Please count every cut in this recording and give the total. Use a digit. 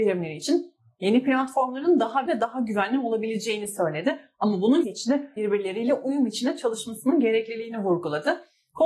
3